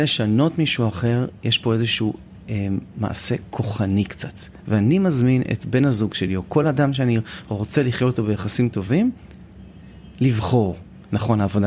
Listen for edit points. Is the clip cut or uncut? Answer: uncut